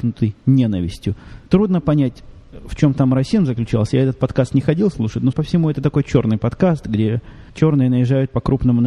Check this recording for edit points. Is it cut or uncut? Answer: cut